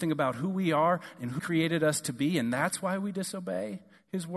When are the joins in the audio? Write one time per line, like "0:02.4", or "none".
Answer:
0:01.4

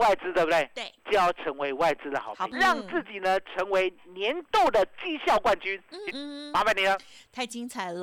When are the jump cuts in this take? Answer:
0:02.5
0:06.1

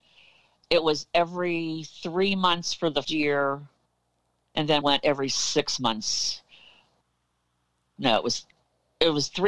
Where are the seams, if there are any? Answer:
0:03.0
0:04.8

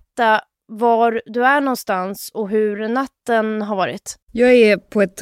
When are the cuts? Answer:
0:04.2

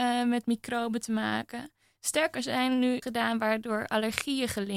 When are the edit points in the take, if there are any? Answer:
0:02.3
0:03.0

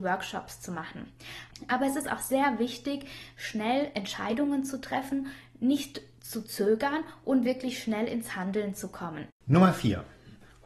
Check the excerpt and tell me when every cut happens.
0:09.4

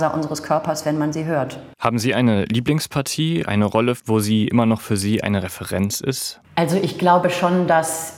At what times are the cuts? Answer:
0:01.7
0:06.4

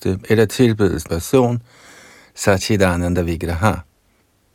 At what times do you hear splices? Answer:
0:01.1

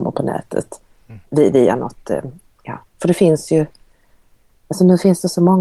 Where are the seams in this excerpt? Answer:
0:01.3

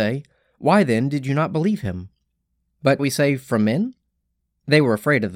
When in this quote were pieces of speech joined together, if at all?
0:03.0

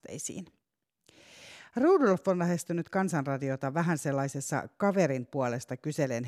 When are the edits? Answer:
none

